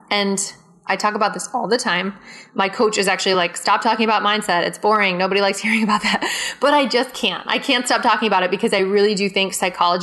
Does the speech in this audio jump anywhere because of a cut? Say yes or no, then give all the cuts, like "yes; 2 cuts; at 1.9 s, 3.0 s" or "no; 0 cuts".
no; 0 cuts